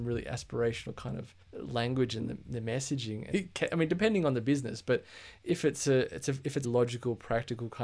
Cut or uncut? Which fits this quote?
cut